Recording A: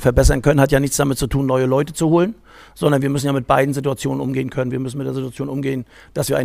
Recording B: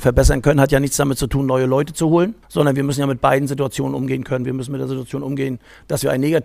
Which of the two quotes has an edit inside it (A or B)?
B